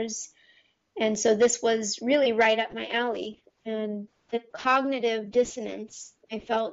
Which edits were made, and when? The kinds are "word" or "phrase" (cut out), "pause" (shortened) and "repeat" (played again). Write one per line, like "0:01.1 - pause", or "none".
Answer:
none